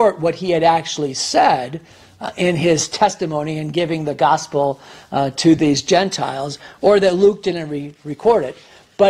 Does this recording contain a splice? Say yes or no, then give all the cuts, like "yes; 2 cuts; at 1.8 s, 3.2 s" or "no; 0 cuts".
no; 0 cuts